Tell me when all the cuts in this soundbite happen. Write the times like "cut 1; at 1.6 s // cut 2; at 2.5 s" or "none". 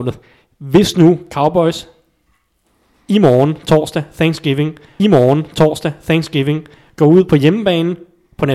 cut 1; at 5.0 s